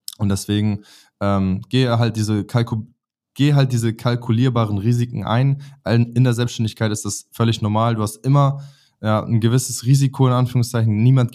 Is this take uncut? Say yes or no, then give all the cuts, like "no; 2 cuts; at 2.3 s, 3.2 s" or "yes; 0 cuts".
yes; 0 cuts